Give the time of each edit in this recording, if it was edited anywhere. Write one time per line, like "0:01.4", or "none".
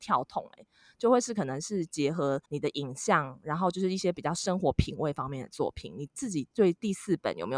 0:02.5

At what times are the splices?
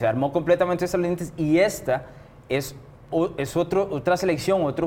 none

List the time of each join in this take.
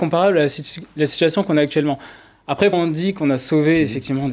0:02.7

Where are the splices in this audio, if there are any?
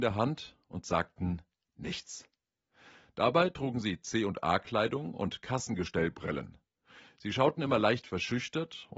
none

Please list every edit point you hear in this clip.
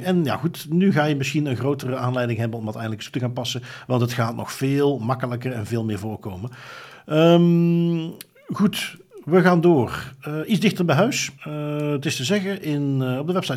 0:11.4

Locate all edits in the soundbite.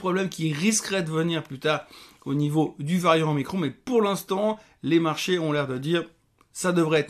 none

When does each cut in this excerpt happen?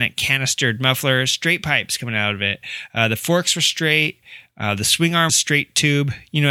0:05.3

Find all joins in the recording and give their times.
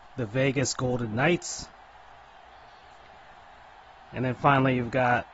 none

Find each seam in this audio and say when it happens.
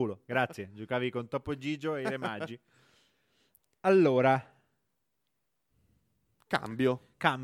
none

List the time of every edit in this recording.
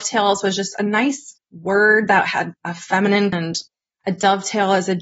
0:01.4
0:02.5
0:03.3

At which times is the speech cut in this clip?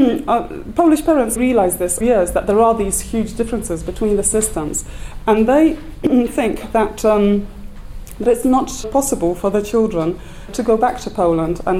0:01.4
0:02.0
0:08.4
0:08.8
0:10.5

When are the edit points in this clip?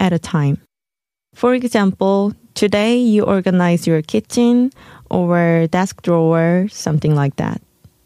none

